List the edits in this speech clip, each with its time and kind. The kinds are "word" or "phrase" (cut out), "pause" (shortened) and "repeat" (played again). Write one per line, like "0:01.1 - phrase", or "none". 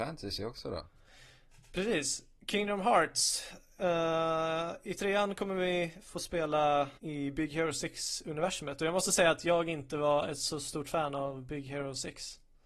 0:07.0 - pause